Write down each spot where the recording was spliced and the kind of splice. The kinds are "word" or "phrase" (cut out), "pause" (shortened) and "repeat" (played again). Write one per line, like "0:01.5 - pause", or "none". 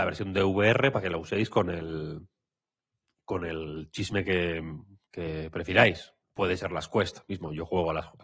0:06.2 - pause